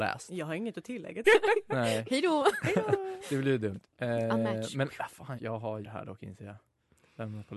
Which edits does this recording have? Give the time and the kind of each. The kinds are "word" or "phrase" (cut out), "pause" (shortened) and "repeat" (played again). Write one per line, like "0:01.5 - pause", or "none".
0:01.2 - phrase
0:03.9 - pause
0:05.4 - word
0:05.8 - word